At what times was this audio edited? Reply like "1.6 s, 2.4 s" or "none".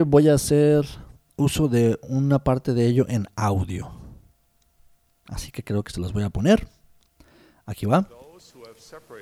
none